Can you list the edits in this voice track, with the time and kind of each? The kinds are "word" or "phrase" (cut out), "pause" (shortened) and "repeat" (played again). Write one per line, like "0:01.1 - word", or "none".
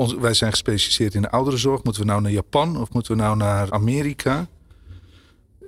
0:03.7 - word